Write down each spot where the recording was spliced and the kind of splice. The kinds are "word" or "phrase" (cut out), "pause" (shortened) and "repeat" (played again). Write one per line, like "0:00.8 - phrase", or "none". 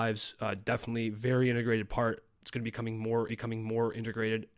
0:03.3 - repeat